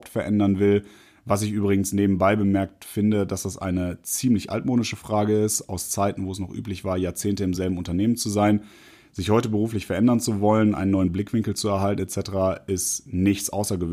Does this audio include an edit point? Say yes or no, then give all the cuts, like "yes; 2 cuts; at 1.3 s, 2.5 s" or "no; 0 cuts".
no; 0 cuts